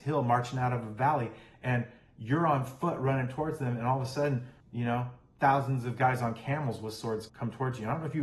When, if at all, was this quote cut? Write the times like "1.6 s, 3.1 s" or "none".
4.6 s, 7.3 s